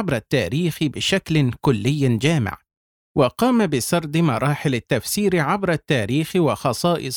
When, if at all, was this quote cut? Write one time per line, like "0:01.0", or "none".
none